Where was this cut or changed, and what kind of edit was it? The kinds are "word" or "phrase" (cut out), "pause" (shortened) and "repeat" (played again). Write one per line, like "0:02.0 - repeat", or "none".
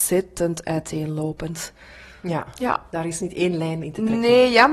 none